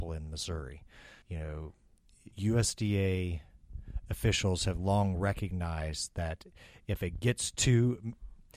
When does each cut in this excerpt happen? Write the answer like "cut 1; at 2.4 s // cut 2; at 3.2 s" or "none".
cut 1; at 1.2 s // cut 2; at 2.3 s